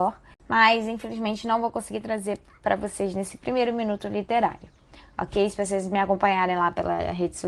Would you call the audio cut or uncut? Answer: uncut